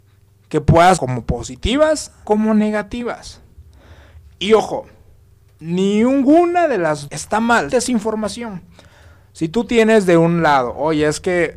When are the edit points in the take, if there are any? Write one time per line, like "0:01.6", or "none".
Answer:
0:01.0
0:02.2
0:07.1
0:07.7